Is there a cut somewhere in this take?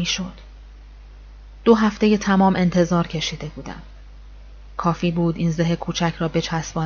no; 0 cuts

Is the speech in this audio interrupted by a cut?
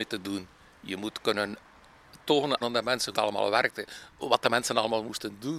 yes; 3 cuts; at 2.6 s, 3.1 s, 4.1 s

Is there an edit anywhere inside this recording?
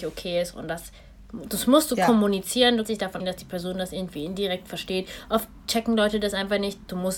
yes; 3 cuts; at 2.8 s, 3.2 s, 5.6 s

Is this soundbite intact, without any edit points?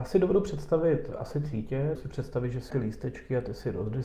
no; 3 cuts; at 1.4 s, 1.9 s, 2.7 s

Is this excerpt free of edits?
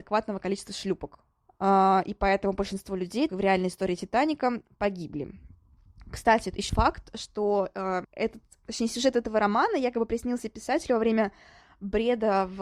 no; 4 cuts; at 1.5 s, 3.3 s, 6.7 s, 8.0 s

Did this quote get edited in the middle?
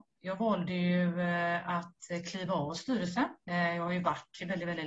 no; 0 cuts

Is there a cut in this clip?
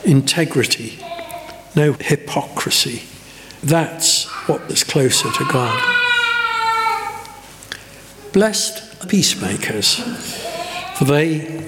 yes; 4 cuts; at 1.9 s, 3.6 s, 4.7 s, 9.0 s

